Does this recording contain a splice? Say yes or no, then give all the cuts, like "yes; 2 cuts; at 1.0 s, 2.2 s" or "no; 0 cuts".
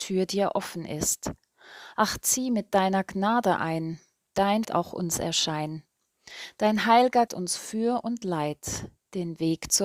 yes; 2 cuts; at 4.6 s, 7.3 s